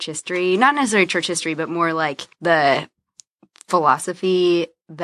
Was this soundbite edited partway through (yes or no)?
no